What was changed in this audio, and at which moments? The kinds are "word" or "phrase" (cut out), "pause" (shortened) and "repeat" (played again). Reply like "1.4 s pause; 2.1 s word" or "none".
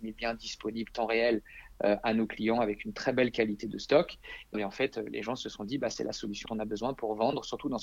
4.5 s word; 6.5 s word